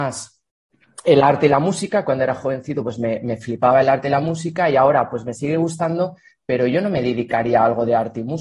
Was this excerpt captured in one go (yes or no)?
yes